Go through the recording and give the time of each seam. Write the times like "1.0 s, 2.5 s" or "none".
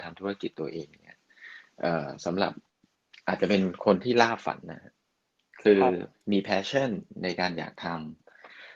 none